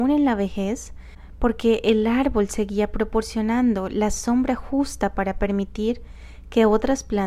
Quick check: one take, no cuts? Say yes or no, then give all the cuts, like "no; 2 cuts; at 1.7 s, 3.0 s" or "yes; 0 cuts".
yes; 0 cuts